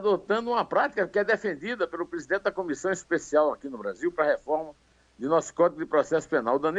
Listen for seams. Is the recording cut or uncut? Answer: uncut